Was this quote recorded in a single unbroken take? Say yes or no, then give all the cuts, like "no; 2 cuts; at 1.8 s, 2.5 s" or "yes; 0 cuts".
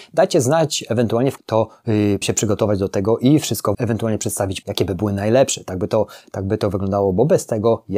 no; 4 cuts; at 1.4 s, 2.2 s, 3.7 s, 4.6 s